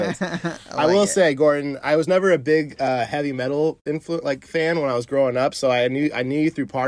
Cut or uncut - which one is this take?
uncut